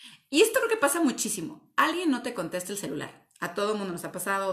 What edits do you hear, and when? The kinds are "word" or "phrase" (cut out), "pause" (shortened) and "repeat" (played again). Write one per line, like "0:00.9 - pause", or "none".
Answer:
none